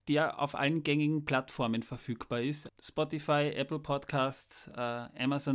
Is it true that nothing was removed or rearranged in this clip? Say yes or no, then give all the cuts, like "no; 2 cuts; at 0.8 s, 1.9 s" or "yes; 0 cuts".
no; 1 cut; at 2.7 s